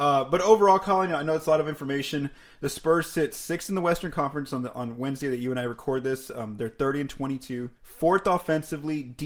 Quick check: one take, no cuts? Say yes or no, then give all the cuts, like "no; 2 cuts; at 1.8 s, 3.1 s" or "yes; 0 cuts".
no; 1 cut; at 7.8 s